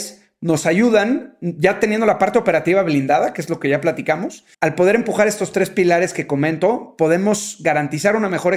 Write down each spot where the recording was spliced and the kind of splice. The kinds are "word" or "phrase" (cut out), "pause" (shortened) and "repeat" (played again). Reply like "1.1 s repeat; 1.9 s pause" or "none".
4.5 s pause